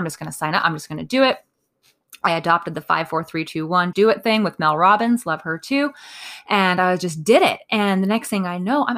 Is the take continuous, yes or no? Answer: no